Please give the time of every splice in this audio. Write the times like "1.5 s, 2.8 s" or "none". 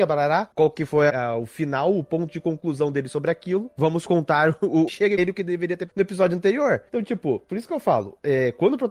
1.1 s, 4.9 s, 5.2 s, 5.9 s, 6.9 s